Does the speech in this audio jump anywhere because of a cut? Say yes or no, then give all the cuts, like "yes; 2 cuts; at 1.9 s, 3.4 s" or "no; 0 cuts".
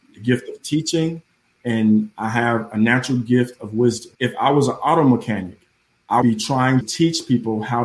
yes; 3 cuts; at 4.1 s, 6.2 s, 6.8 s